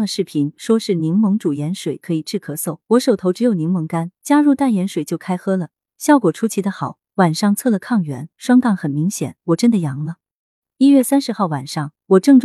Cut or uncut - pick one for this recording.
cut